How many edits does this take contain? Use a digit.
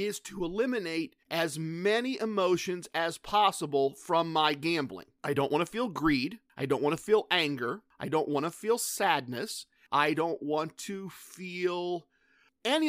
0